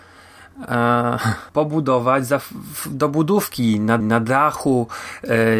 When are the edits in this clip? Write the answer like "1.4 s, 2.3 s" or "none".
4.0 s